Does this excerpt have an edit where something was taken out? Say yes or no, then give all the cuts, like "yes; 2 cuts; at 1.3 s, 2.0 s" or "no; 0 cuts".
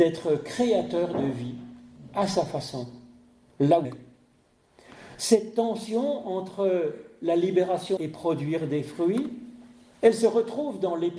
yes; 2 cuts; at 3.8 s, 8.0 s